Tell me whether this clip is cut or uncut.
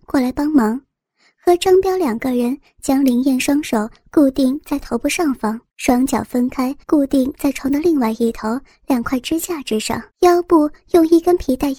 cut